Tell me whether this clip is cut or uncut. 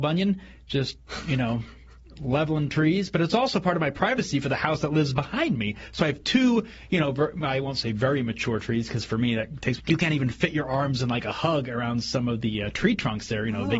cut